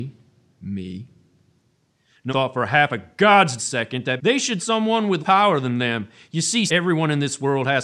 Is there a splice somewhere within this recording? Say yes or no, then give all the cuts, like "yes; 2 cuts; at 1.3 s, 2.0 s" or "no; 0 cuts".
yes; 6 cuts; at 2.3 s, 3.6 s, 4.2 s, 4.6 s, 5.2 s, 6.7 s